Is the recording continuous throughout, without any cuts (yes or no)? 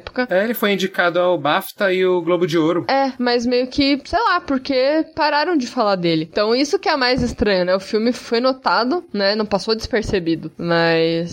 yes